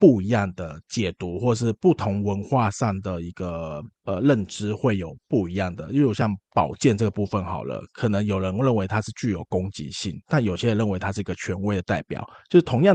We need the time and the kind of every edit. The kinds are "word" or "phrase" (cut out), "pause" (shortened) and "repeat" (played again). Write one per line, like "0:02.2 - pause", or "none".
0:04.0 - pause
0:05.2 - pause

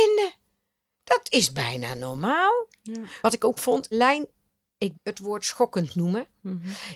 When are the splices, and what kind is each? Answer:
0:03.6 - word
0:03.9 - word
0:04.9 - word

